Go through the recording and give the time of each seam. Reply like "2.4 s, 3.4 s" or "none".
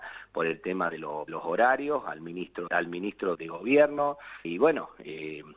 1.3 s, 2.7 s, 3.3 s, 4.4 s